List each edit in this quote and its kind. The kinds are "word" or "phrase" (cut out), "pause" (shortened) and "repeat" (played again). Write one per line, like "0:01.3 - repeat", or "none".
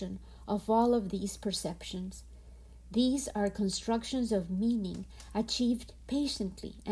none